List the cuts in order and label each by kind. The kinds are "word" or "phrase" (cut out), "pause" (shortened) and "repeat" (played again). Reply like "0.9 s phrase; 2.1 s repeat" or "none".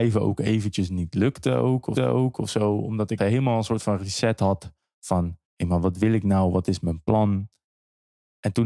2.0 s repeat; 3.2 s word; 5.5 s pause

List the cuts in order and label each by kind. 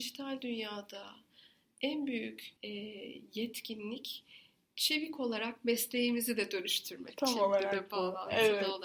2.6 s pause

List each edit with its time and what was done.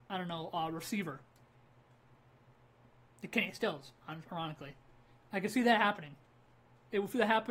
none

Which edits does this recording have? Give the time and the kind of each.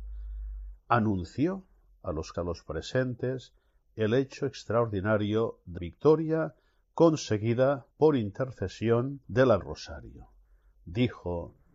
2.3 s word; 5.8 s word; 7.9 s pause; 9.2 s pause; 9.6 s phrase

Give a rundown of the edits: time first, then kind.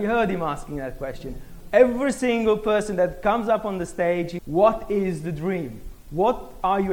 4.4 s word

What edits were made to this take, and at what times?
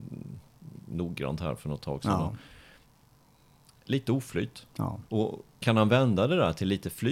5.1 s pause

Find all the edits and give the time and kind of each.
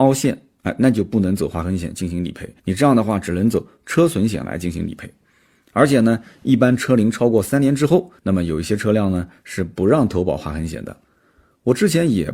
2.6 s pause; 8.2 s pause

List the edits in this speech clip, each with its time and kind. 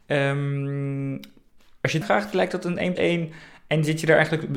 2.0 s word; 3.0 s word

